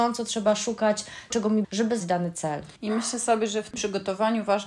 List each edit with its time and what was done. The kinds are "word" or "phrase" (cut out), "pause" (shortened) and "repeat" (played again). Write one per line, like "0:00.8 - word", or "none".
0:01.3 - word
0:01.6 - word
0:02.0 - word
0:02.8 - pause
0:03.7 - word